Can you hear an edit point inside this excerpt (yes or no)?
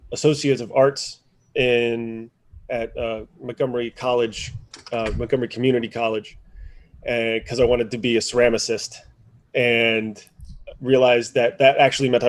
no